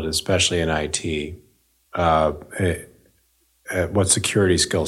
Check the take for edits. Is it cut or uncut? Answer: uncut